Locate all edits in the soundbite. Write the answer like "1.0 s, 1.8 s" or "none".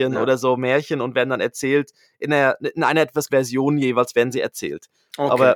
3.3 s